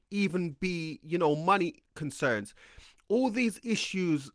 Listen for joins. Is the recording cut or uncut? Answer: uncut